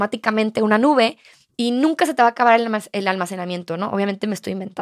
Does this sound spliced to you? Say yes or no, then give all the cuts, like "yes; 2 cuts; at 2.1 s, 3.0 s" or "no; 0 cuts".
no; 0 cuts